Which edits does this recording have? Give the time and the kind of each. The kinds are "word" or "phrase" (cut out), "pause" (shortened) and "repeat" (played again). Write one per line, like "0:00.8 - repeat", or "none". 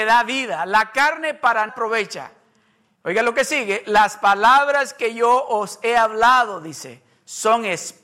0:01.7 - word

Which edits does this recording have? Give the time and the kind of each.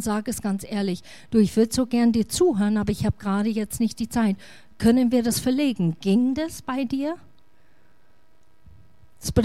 none

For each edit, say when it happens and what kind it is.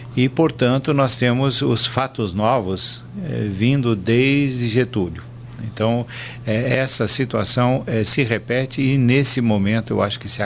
none

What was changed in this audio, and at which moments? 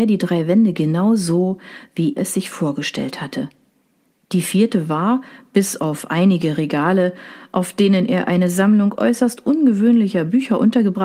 0:02.2 - word

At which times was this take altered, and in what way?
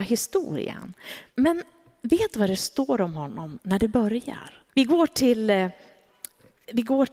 0:01.3 - pause
0:04.7 - pause

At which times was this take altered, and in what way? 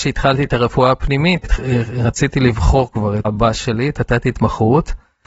0:01.4 - word
0:03.2 - word

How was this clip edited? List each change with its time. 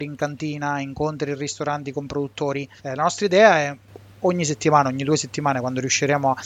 0:02.8 - pause

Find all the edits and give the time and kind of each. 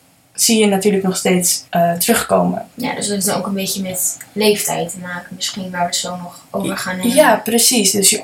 0:01.7 - pause
0:02.7 - pause

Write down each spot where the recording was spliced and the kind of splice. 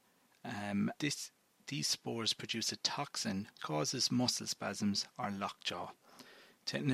0:01.0 - word
0:03.6 - word

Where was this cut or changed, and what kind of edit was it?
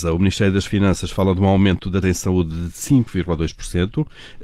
0:02.0 - word

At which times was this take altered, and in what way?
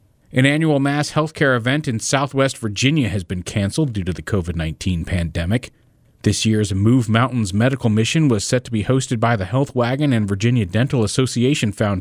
none

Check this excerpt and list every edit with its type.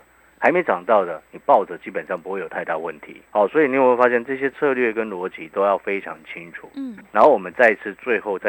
0:03.3 - pause

